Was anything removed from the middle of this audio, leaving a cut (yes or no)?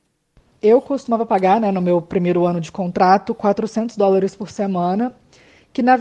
no